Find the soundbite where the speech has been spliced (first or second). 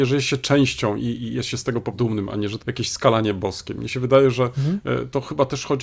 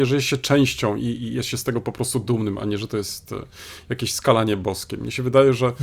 first